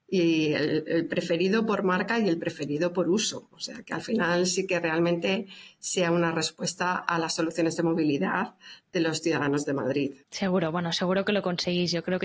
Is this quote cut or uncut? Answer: cut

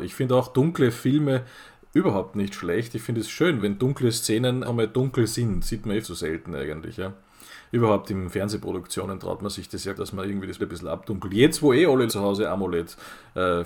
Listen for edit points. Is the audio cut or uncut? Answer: cut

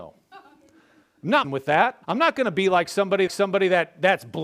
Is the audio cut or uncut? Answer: cut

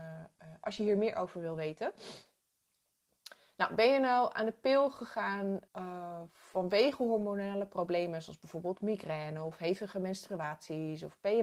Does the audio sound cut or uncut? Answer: cut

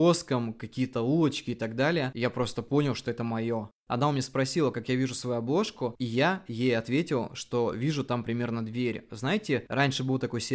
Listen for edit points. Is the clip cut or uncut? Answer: cut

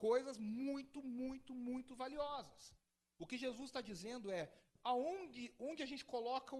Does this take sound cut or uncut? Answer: uncut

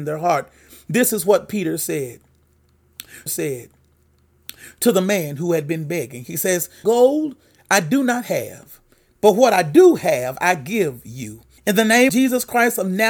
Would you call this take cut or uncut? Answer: cut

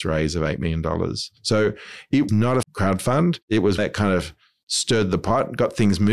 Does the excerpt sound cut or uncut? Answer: cut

